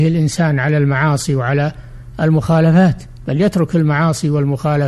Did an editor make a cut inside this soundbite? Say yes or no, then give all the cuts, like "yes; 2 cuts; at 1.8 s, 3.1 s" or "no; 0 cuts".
no; 0 cuts